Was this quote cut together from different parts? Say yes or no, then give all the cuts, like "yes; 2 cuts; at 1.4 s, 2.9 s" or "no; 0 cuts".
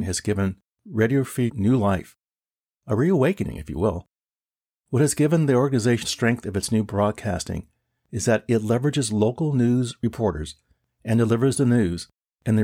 yes; 2 cuts; at 1.5 s, 6.0 s